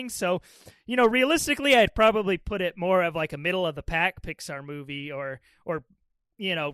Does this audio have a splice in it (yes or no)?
no